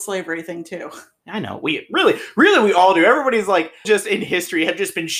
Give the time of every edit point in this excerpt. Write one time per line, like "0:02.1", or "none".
0:03.8